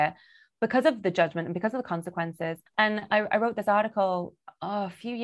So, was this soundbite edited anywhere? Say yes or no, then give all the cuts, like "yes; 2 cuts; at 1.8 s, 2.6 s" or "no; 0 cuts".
yes; 1 cut; at 2.7 s